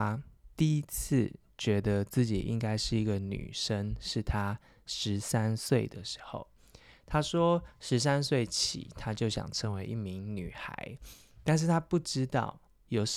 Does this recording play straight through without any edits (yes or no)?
yes